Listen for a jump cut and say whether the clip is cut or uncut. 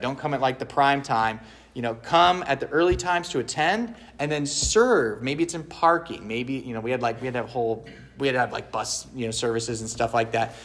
uncut